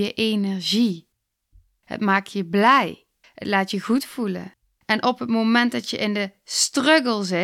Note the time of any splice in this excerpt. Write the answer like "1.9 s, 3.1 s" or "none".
3.2 s, 4.6 s